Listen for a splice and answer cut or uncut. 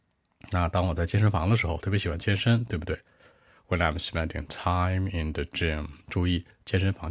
uncut